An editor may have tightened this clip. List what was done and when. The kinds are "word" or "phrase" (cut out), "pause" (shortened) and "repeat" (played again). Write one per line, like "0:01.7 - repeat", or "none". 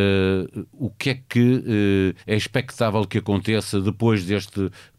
0:02.2 - pause